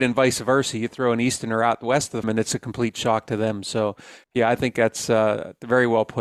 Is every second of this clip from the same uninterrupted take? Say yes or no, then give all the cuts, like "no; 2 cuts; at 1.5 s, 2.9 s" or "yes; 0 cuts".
no; 1 cut; at 2.2 s